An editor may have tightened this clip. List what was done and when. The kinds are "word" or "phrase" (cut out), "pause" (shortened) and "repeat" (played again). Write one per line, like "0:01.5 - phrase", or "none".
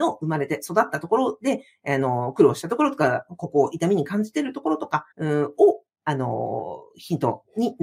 0:05.1 - pause